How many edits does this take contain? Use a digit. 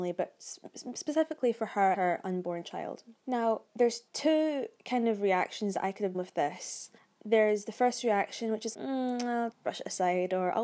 7